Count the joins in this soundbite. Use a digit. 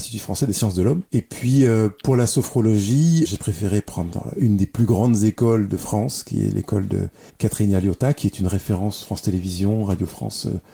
1